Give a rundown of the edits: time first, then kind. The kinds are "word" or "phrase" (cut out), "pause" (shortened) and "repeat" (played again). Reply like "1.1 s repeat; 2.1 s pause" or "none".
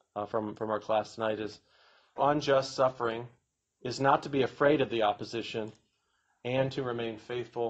2.2 s phrase